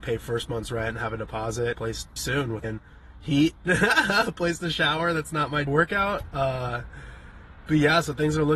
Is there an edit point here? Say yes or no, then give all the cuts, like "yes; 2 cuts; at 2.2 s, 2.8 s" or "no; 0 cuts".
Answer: yes; 5 cuts; at 1.7 s, 2.2 s, 2.6 s, 3.7 s, 5.7 s